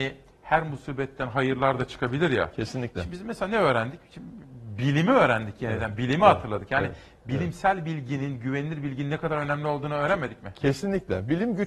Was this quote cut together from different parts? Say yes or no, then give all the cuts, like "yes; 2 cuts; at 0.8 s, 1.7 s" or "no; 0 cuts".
no; 0 cuts